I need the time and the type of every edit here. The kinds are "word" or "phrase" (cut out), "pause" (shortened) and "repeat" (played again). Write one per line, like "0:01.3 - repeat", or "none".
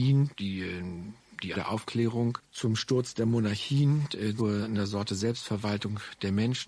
0:01.5 - word
0:04.4 - word